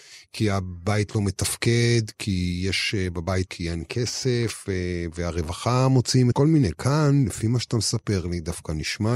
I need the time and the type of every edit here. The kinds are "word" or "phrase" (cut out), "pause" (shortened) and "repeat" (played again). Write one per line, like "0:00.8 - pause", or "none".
0:03.5 - word
0:06.3 - phrase